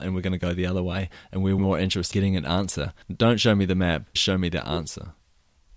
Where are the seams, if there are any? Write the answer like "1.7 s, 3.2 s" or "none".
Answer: 1.6 s, 2.1 s, 3.0 s, 4.2 s